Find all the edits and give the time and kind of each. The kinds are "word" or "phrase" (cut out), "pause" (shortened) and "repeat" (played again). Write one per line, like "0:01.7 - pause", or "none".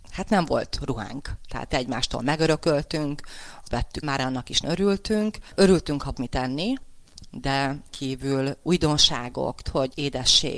0:01.7 - word
0:03.6 - word
0:04.0 - word
0:04.6 - word
0:06.1 - word
0:07.9 - word
0:09.6 - word